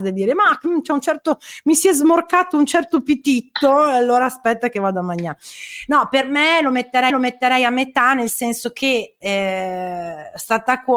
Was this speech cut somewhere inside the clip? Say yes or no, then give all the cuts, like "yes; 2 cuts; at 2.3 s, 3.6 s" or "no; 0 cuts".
yes; 1 cut; at 7.1 s